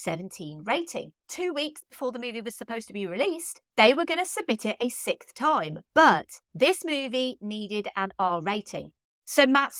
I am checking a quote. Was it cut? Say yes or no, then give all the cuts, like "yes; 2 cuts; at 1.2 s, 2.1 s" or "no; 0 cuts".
yes; 3 cuts; at 1.2 s, 3.7 s, 6.4 s